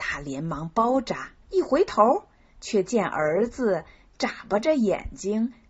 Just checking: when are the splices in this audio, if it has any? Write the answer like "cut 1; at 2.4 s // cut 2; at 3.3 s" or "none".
cut 1; at 1.4 s